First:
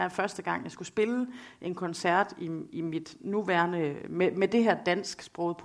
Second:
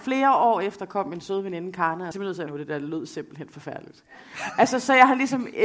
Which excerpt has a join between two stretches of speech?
second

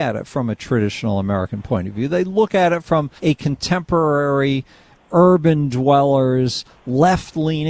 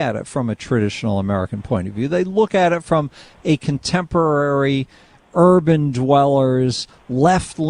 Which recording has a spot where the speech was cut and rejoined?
first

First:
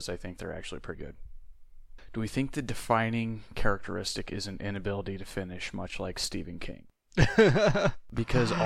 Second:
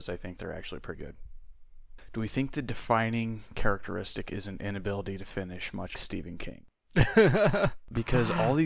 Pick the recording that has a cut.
second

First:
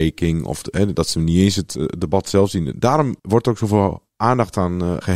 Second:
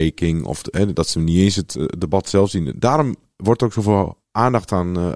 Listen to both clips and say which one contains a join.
first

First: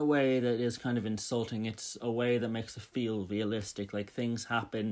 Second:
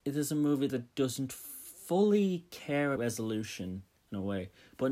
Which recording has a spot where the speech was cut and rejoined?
second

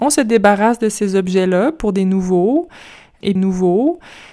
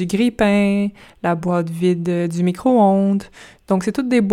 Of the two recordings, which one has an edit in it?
first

